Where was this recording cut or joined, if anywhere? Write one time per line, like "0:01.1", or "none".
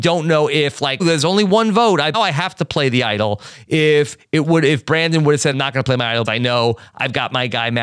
0:01.0
0:02.1
0:05.5
0:06.2